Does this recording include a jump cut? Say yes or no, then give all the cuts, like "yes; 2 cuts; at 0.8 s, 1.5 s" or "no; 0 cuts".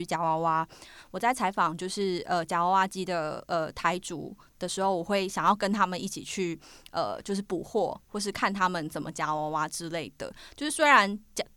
no; 0 cuts